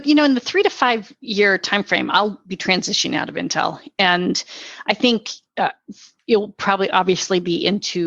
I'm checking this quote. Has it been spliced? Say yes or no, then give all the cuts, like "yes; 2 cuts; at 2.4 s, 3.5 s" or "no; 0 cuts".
no; 0 cuts